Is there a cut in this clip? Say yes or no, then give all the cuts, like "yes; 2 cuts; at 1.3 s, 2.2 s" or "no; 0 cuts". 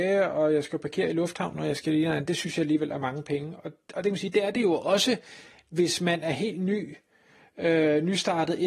no; 0 cuts